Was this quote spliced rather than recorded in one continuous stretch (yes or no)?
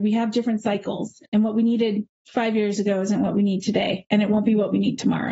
yes